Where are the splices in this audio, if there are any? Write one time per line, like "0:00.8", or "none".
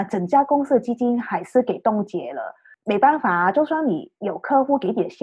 none